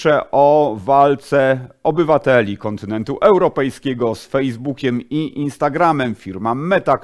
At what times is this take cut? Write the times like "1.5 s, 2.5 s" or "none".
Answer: none

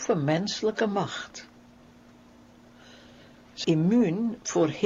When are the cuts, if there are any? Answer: 3.6 s

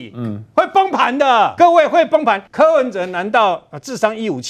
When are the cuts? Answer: 1.6 s, 2.5 s

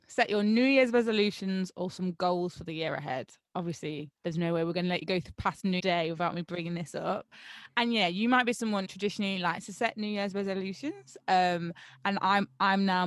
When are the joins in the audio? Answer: 4.2 s, 5.8 s, 8.8 s

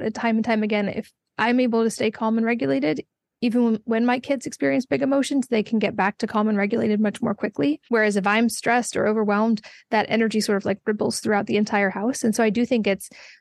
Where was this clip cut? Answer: 7.9 s

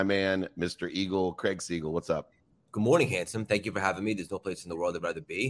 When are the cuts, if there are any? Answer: none

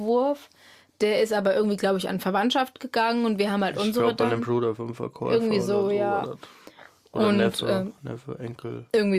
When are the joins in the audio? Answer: none

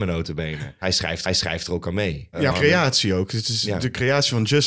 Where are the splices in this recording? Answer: 1.3 s, 2.5 s

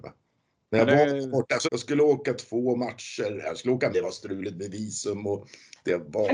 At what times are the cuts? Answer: 1.6 s, 3.9 s

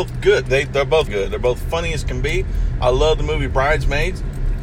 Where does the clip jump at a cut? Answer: 1.1 s

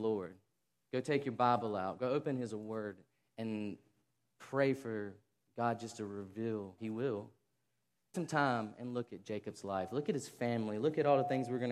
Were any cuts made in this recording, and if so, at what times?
6.8 s, 8.1 s

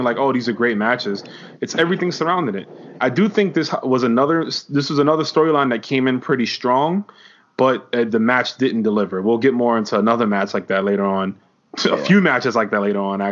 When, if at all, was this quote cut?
none

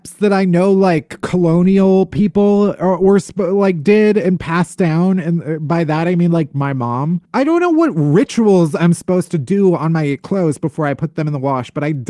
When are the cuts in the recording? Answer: 7.3 s

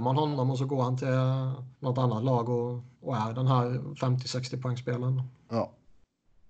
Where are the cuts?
1.7 s, 2.9 s

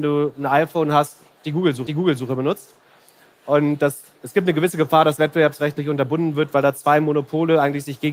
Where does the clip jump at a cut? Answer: 1.9 s, 5.2 s

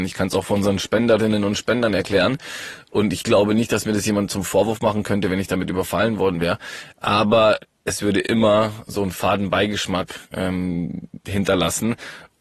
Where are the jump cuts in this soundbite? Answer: 10.2 s

